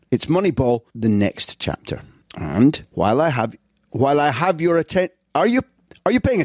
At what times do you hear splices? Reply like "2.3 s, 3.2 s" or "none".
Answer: none